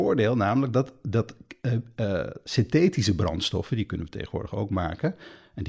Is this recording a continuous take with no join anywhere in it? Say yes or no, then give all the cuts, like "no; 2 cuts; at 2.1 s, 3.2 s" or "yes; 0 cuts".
yes; 0 cuts